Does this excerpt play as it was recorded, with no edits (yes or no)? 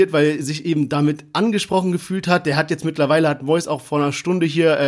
yes